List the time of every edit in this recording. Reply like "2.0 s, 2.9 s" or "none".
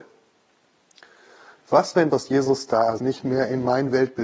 2.1 s, 3.0 s